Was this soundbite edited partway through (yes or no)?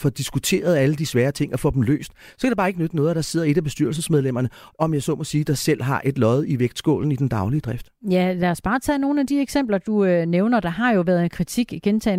no